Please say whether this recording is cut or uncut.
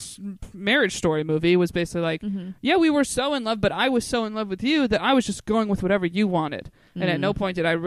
uncut